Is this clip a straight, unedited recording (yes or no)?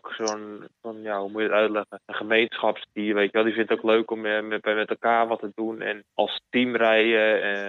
no